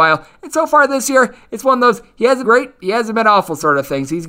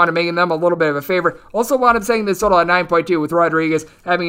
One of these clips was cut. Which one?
first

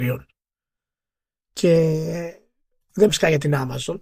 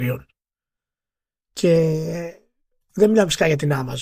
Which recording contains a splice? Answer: first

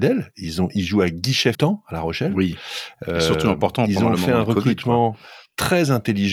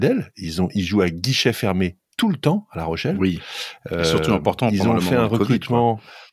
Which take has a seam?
first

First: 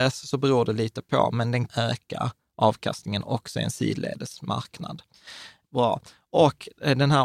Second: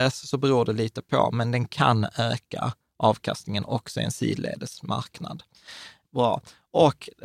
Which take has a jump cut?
first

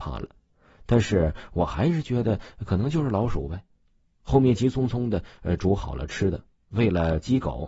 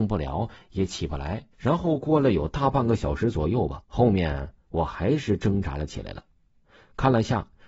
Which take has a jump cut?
second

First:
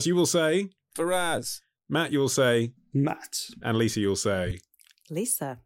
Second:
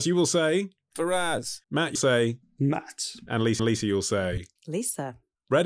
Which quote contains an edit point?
second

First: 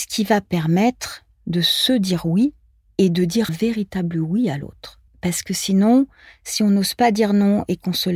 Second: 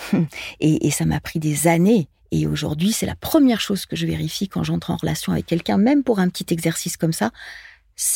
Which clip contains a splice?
first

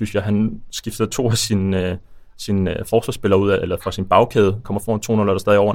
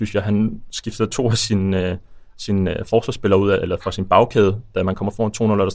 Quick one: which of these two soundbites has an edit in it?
first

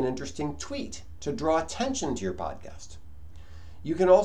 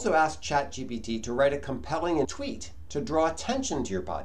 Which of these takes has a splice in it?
second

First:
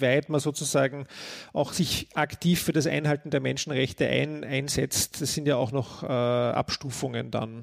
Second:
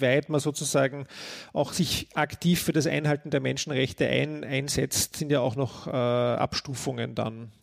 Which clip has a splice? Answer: second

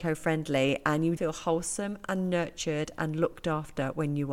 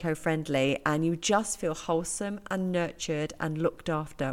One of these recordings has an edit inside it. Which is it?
first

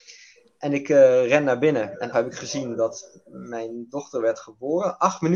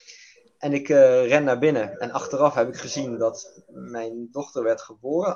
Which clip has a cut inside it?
first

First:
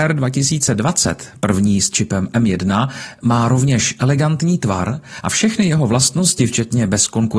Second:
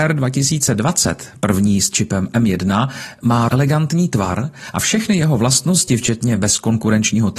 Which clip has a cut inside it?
second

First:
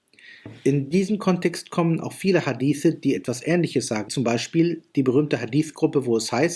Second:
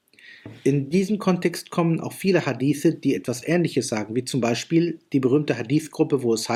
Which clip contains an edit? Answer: first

